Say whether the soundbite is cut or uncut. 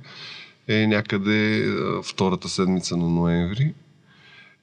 uncut